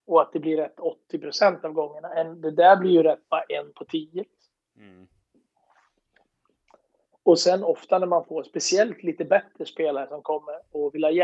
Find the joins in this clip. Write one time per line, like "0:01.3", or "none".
none

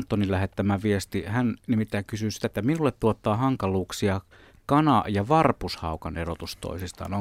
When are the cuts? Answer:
none

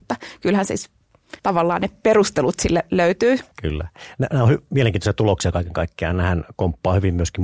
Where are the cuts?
0:01.4
0:03.5

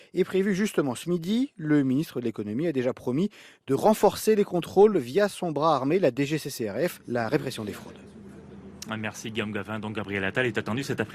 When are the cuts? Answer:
none

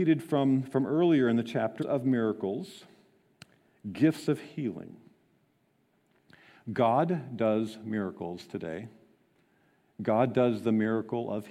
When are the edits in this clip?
0:01.8

